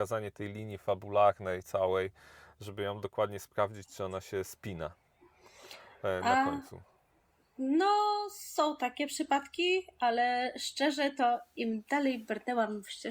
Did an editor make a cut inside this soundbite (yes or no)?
no